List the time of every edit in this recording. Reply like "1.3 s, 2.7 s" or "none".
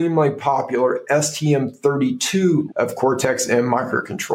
2.7 s